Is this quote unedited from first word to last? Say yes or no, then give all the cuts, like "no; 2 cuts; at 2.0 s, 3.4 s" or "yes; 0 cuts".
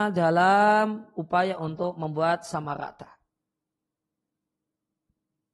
yes; 0 cuts